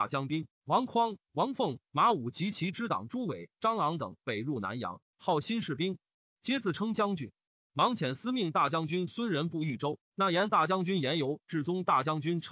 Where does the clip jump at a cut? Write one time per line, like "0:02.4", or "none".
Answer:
none